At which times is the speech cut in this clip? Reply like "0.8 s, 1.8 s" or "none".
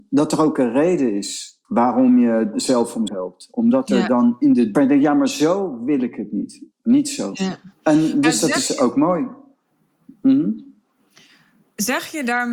1.6 s, 2.5 s, 3.1 s, 4.7 s, 6.7 s, 7.7 s

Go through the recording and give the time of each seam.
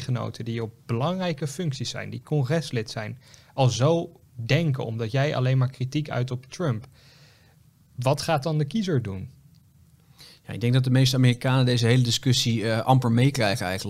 none

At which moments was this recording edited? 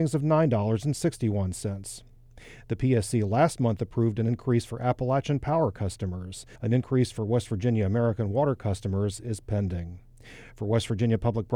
6.6 s

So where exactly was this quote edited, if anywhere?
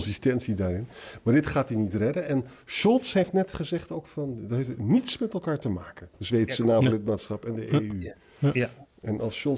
6.1 s

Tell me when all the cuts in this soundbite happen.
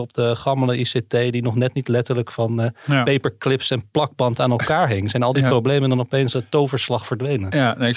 6.3 s

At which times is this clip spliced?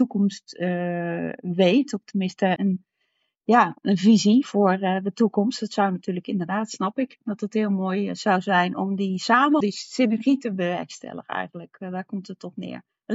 2.6 s, 4.4 s, 9.6 s

